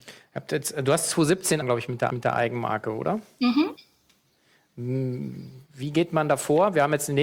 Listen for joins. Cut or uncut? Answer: cut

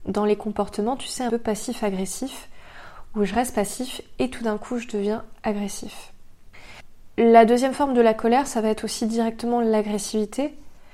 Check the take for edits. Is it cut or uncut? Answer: cut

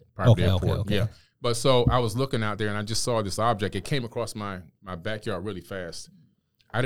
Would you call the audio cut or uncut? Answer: uncut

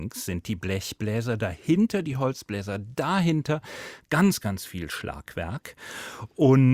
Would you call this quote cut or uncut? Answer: uncut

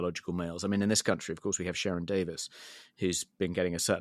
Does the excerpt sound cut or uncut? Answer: uncut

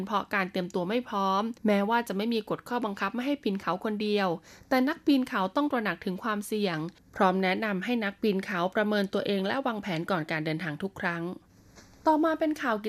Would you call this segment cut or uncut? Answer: cut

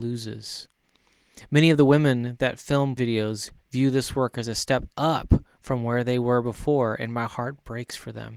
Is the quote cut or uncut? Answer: cut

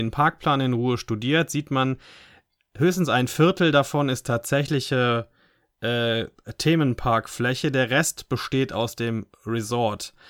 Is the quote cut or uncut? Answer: uncut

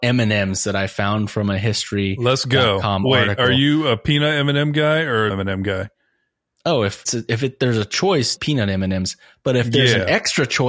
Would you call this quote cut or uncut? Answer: cut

